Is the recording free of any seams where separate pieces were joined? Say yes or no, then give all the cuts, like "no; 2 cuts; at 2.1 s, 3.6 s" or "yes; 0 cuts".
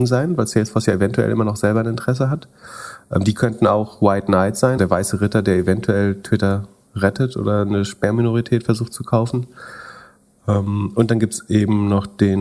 no; 1 cut; at 4.8 s